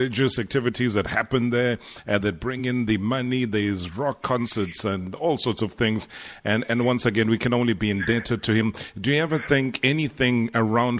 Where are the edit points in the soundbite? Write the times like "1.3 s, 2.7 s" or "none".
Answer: none